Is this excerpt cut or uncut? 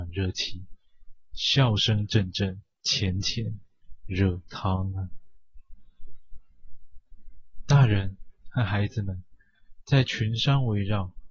cut